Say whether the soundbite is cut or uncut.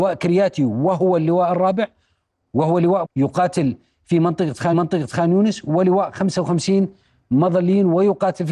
cut